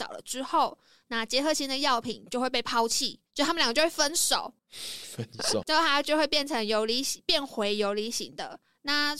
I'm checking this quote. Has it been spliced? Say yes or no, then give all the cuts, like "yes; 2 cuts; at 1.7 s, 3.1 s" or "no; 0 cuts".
yes; 3 cuts; at 3.3 s, 4.6 s, 5.6 s